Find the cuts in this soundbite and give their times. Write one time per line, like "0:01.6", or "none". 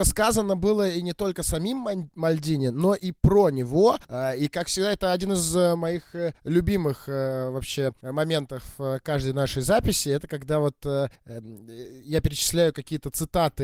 0:04.0
0:06.4
0:08.0
0:11.1

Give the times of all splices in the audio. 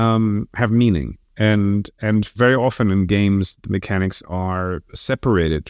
none

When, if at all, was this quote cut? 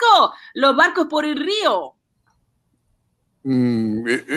0:01.1

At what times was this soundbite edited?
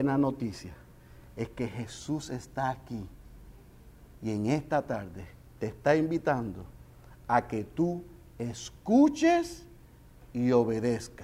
none

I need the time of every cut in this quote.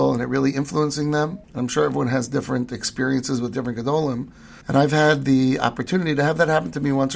0:01.4
0:04.6

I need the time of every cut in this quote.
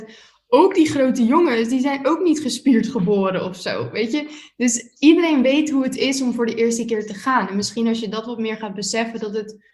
none

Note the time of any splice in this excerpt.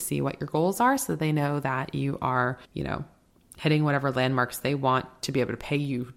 0:02.6

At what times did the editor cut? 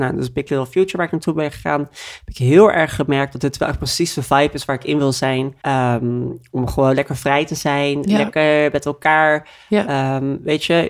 0:05.6

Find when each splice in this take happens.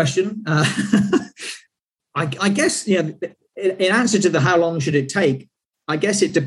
none

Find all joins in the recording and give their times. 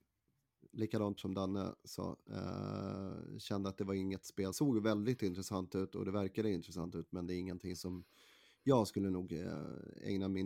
0:01.2
0:04.5

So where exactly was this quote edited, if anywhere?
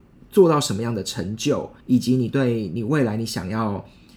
0:01.8

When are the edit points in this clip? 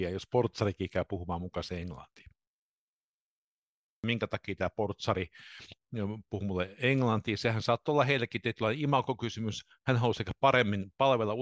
none

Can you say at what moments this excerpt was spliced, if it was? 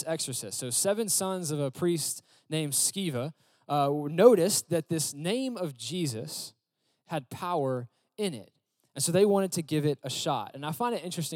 none

